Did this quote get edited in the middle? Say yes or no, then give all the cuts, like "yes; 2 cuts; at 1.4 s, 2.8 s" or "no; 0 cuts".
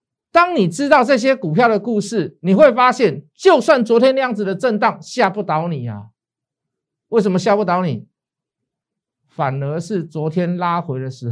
no; 0 cuts